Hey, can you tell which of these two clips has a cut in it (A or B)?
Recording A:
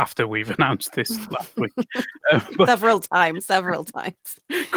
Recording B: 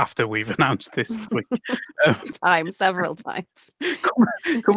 B